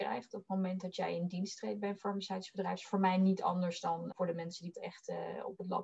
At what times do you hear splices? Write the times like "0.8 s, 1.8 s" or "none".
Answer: 4.1 s, 4.7 s

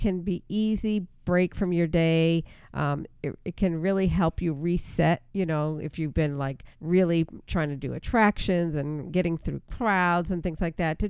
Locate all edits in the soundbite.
5.3 s, 6.7 s

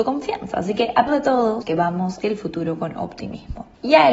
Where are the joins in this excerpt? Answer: 1.1 s, 1.6 s, 2.2 s

